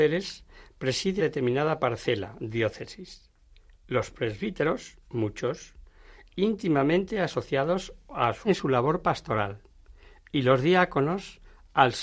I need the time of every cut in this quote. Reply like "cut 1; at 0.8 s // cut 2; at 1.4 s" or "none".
cut 1; at 1.2 s // cut 2; at 8.4 s